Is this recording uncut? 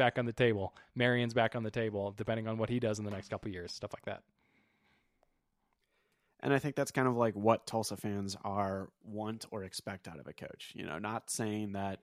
yes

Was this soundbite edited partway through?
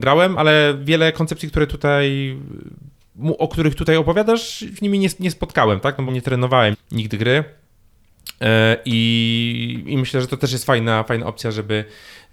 yes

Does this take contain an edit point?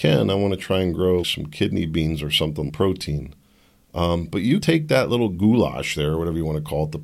yes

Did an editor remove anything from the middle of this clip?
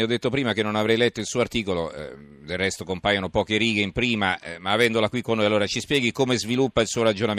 no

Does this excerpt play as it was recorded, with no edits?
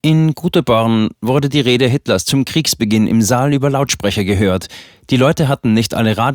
yes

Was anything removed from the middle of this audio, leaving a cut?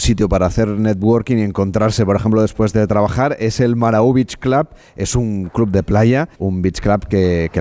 yes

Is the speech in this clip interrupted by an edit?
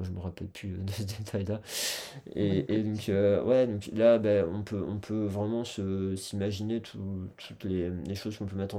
no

